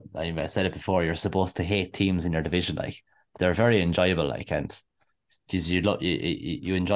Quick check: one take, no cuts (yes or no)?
yes